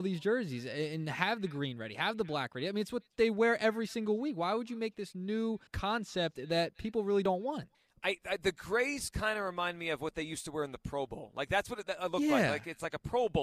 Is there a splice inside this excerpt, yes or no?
yes